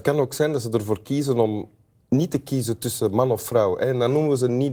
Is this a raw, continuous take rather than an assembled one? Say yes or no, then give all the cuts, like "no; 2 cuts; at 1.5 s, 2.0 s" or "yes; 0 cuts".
yes; 0 cuts